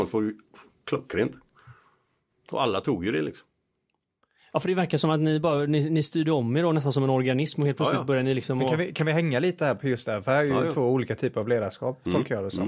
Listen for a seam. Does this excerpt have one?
no; 0 cuts

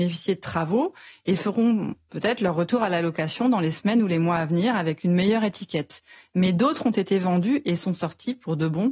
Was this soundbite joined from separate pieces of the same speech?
no; 0 cuts

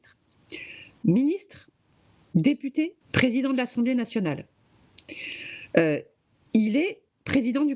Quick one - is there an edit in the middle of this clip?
yes; 1 cut; at 3.0 s

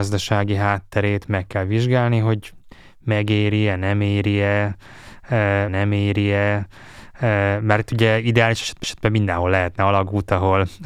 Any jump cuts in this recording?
yes; 2 cuts; at 5.7 s, 8.8 s

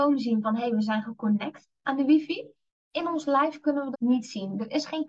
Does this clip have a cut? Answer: yes; 3 cuts; at 1.7 s, 2.7 s, 3.9 s

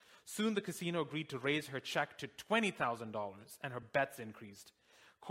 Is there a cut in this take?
no; 0 cuts

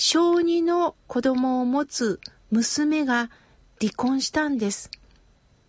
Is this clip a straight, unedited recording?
yes; 0 cuts

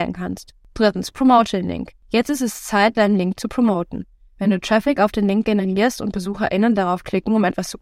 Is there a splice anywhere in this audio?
no; 0 cuts

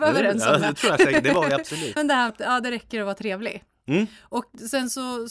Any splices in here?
yes; 2 cuts; at 2.0 s, 2.3 s

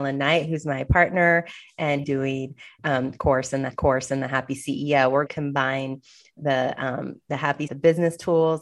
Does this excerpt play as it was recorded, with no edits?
no; 5 cuts; at 2.0 s, 2.8 s, 3.7 s, 5.3 s, 7.7 s

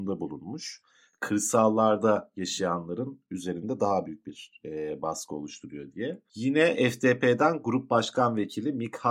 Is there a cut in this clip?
no; 0 cuts

